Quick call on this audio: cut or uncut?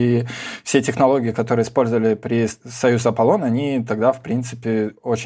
uncut